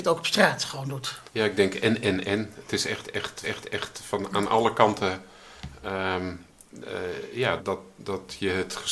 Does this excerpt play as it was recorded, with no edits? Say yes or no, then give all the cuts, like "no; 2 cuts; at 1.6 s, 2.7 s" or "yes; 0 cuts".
no; 3 cuts; at 1.3 s, 3.4 s, 7.6 s